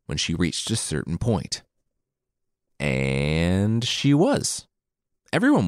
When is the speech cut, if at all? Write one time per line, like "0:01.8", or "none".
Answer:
none